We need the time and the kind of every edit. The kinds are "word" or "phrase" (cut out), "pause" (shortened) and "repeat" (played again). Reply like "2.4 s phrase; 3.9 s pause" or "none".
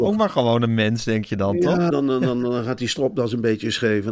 1.9 s word